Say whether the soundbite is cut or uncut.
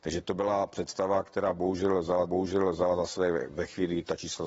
cut